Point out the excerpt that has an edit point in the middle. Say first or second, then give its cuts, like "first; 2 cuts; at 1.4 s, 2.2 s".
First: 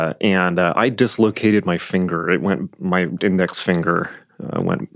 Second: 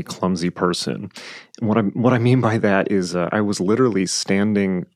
first; 1 cut; at 3.2 s